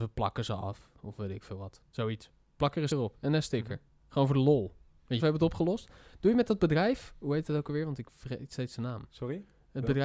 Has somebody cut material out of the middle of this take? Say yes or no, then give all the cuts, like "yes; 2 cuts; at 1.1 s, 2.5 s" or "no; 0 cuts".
yes; 2 cuts; at 2.9 s, 5.2 s